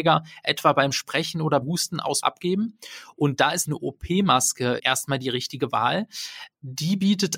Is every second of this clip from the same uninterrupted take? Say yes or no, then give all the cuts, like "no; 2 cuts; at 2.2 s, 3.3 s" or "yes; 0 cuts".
no; 4 cuts; at 1.6 s, 2.2 s, 3.7 s, 4.8 s